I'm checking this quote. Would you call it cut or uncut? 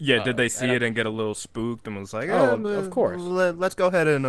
uncut